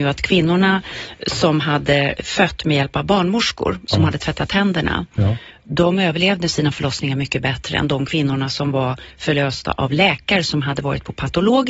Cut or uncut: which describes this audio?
uncut